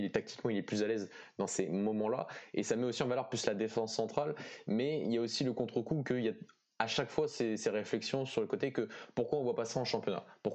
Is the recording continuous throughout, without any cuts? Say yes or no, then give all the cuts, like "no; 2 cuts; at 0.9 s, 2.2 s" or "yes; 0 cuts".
yes; 0 cuts